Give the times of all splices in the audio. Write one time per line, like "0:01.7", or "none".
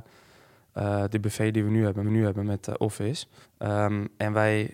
0:02.0
0:03.4